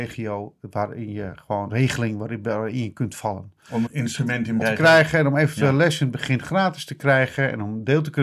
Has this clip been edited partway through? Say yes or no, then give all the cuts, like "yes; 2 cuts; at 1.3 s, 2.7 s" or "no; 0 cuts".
yes; 3 cuts; at 1.7 s, 3.9 s, 4.6 s